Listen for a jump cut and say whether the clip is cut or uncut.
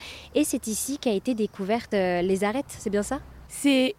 uncut